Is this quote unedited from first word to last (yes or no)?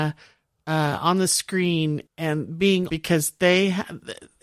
no